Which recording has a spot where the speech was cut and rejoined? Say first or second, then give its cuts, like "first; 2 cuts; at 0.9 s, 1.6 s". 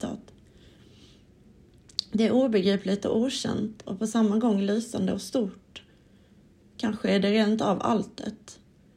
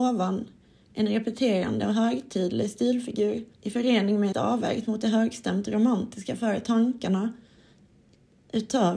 second; 2 cuts; at 3.5 s, 4.3 s